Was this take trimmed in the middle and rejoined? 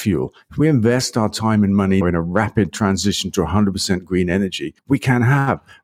yes; 2 cuts; at 2.0 s, 4.8 s

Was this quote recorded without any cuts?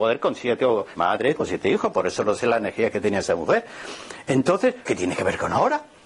no; 3 cuts; at 1.0 s, 1.4 s, 4.9 s

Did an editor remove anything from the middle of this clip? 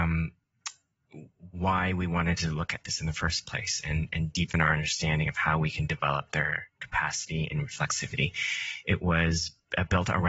no; 0 cuts

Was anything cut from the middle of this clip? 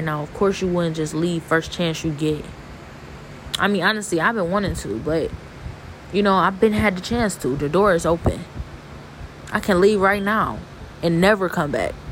no; 0 cuts

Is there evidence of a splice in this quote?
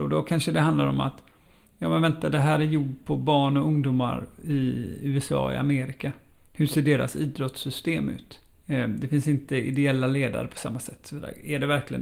no; 0 cuts

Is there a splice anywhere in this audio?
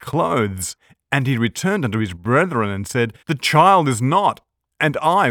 yes; 1 cut; at 3.2 s

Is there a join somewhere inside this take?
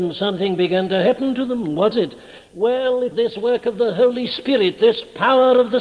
yes; 2 cuts; at 1.9 s, 3.1 s

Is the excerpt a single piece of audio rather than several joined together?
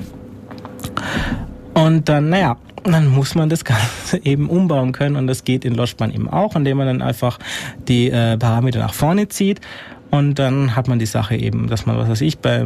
yes; 0 cuts

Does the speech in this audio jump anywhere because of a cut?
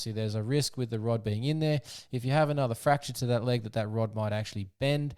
no; 0 cuts

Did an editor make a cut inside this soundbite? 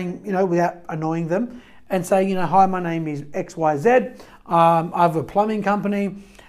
no; 0 cuts

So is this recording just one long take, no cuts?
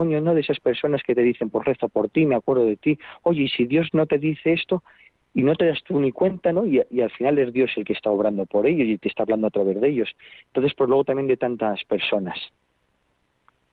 yes; 0 cuts

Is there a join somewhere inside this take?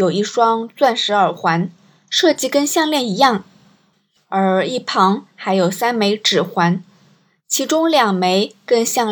no; 0 cuts

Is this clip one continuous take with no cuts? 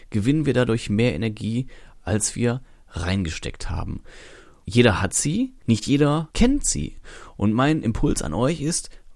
yes; 0 cuts

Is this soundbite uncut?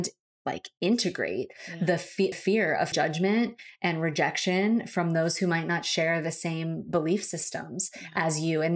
no; 2 cuts; at 2.3 s, 2.9 s

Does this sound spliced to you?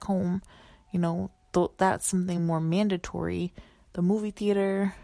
no; 0 cuts

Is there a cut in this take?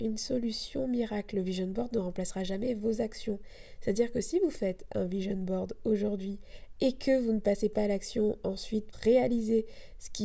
yes; 1 cut; at 8.9 s

